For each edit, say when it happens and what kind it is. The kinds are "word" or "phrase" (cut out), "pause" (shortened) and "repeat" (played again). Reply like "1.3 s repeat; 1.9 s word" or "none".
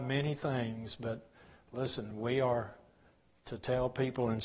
none